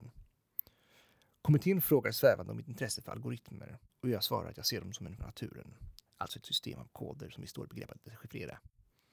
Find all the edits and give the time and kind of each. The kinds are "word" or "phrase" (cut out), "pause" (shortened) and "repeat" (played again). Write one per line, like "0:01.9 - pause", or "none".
0:03.9 - pause
0:05.2 - word
0:06.1 - pause
0:06.4 - word